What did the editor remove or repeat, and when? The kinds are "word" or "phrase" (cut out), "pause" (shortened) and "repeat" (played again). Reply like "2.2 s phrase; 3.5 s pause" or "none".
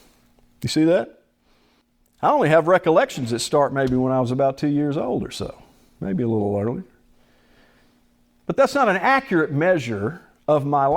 none